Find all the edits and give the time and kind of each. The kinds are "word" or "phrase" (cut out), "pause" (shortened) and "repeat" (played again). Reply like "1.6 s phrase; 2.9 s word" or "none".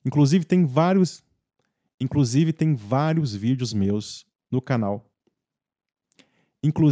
none